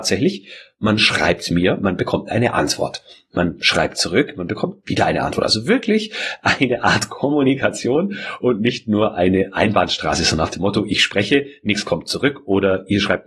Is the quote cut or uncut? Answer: uncut